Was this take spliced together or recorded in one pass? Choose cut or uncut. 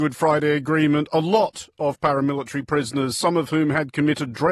uncut